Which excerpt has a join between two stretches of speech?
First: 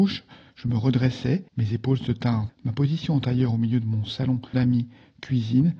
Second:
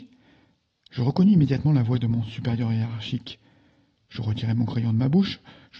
first; 3 cuts; at 1.5 s, 2.5 s, 4.5 s

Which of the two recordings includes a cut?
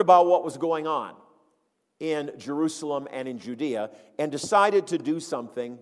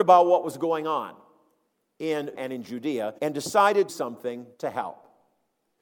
second; 4 cuts; at 2.4 s, 3.2 s, 3.9 s, 4.5 s

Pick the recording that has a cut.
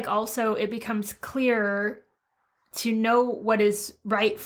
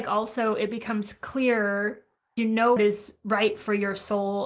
second; 2 cuts; at 2.4 s, 2.8 s

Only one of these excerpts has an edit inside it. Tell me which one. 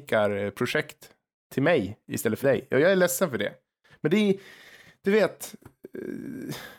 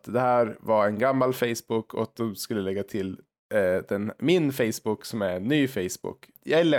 first; 1 cut; at 2.4 s

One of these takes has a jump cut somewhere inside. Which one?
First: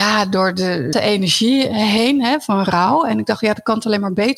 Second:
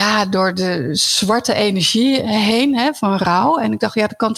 first; 1 cut; at 0.9 s

